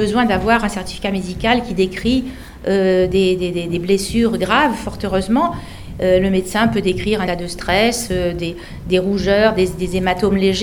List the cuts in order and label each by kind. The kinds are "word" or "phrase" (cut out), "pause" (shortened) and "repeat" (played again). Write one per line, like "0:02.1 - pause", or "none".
0:07.3 - word